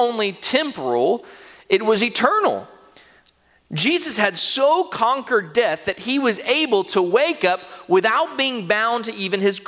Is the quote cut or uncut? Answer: uncut